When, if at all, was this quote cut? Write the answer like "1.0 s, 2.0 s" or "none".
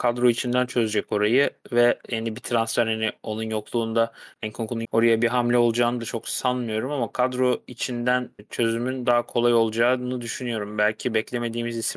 4.8 s